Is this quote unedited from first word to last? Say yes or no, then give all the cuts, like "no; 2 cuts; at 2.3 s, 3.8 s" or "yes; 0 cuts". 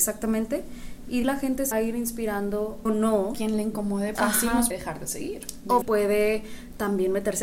no; 7 cuts; at 1.2 s, 1.7 s, 2.9 s, 3.3 s, 4.2 s, 4.7 s, 5.8 s